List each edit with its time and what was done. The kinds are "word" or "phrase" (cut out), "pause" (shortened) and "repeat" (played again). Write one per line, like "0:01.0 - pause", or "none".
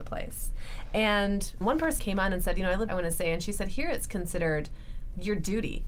0:01.6 - word
0:02.0 - word
0:02.9 - phrase